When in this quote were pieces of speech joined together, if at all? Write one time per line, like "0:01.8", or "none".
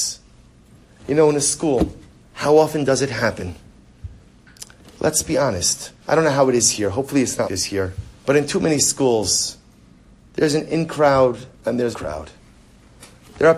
0:02.2
0:06.0
0:07.5
0:08.2
0:11.5
0:11.9